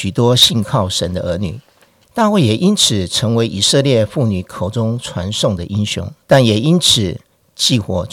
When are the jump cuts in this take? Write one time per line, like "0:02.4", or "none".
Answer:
0:01.9
0:06.2